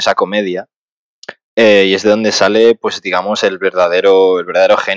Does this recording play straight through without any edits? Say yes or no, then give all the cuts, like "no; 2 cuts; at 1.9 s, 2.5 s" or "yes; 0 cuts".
yes; 0 cuts